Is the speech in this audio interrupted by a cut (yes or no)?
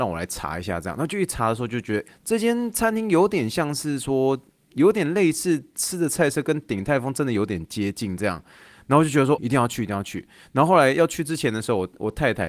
yes